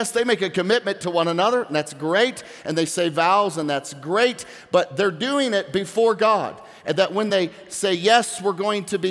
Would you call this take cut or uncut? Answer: uncut